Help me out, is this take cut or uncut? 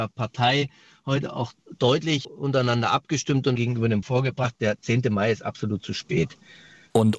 cut